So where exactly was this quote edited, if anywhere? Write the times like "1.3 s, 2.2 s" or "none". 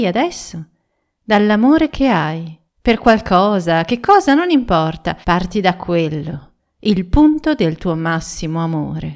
2.7 s, 5.2 s

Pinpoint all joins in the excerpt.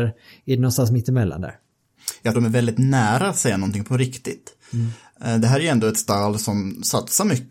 2.3 s

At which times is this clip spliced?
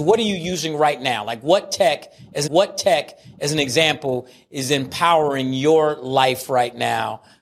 2.5 s

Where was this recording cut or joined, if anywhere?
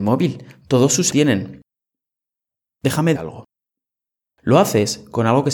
1.1 s, 3.2 s

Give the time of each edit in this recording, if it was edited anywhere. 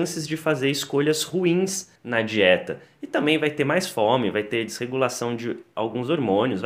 2.0 s

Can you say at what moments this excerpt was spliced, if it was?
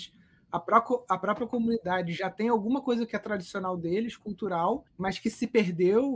4.9 s

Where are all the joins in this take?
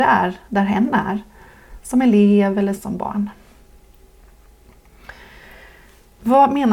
2.8 s

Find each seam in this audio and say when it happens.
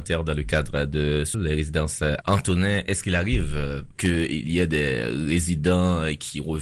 1.3 s, 2.2 s, 4.0 s

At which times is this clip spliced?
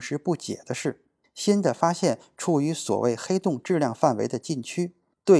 none

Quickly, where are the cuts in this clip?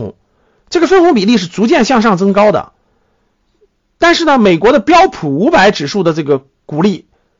none

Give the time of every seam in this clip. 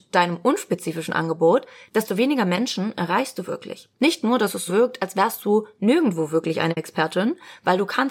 4.7 s

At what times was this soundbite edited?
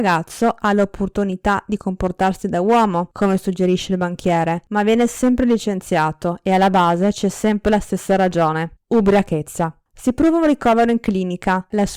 none

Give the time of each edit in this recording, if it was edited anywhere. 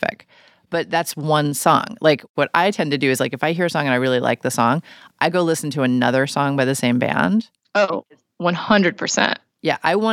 none

